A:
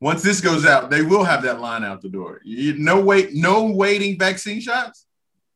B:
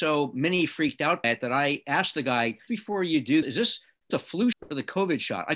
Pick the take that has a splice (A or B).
B